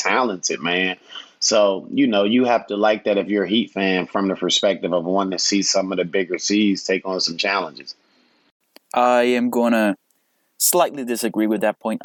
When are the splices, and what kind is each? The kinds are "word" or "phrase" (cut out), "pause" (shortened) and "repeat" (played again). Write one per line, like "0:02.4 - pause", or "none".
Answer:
none

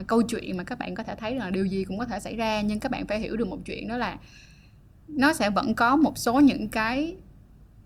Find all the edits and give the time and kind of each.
none

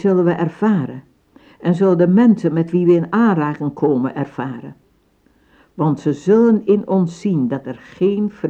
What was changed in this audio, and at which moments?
none

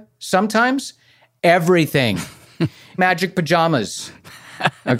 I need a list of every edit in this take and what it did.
0:03.0 - word

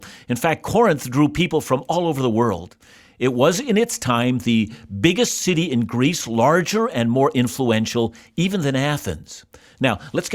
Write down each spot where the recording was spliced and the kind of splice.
none

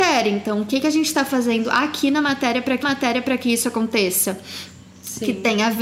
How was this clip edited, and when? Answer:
0:02.8 - repeat

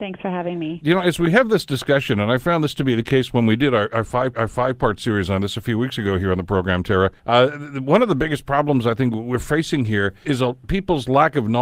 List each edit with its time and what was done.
0:04.3 - repeat
0:07.2 - pause
0:10.2 - word

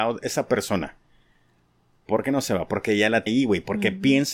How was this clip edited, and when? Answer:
0:03.3 - word

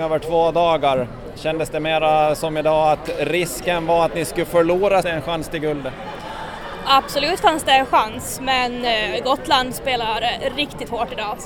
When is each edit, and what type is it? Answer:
0:05.0 - phrase

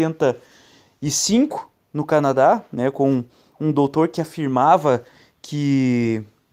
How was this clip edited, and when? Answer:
none

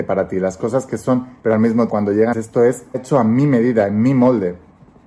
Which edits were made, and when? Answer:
0:01.4 - word
0:01.9 - word
0:02.3 - word
0:02.9 - word

